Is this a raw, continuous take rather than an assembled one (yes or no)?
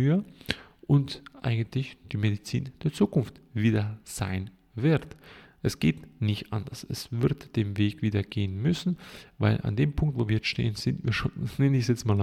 yes